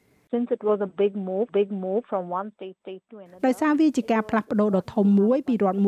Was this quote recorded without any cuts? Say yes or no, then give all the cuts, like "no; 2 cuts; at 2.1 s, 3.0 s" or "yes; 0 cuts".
no; 2 cuts; at 1.5 s, 2.8 s